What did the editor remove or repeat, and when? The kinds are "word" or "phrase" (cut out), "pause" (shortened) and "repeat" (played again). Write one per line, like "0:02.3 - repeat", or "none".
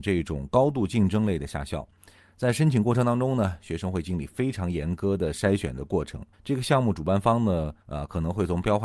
0:06.3 - pause
0:07.8 - pause